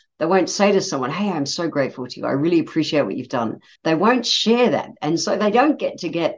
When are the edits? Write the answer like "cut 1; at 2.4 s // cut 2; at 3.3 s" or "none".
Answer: cut 1; at 3.7 s

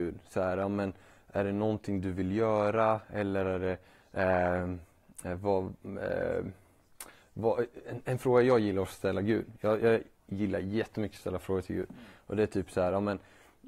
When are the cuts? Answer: none

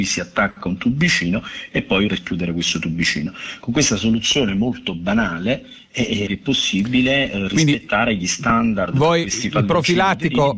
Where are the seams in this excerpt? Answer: cut 1; at 2.1 s // cut 2; at 6.3 s

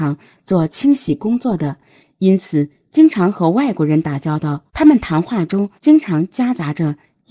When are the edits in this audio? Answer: cut 1; at 4.7 s // cut 2; at 5.8 s

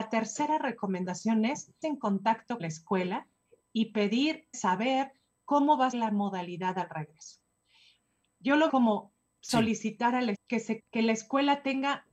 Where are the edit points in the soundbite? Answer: cut 1; at 1.8 s // cut 2; at 2.6 s // cut 3; at 4.5 s // cut 4; at 5.9 s // cut 5; at 8.7 s // cut 6; at 10.3 s // cut 7; at 10.8 s

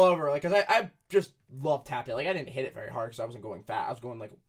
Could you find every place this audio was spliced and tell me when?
cut 1; at 1.4 s

